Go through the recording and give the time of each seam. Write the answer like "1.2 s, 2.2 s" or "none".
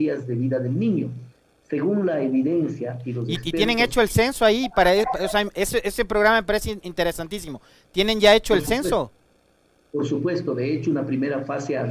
none